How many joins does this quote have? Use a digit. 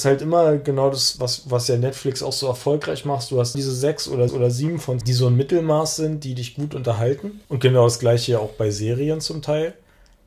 5